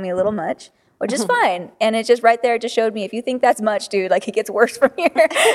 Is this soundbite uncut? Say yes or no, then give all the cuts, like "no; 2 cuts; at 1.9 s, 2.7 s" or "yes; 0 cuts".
yes; 0 cuts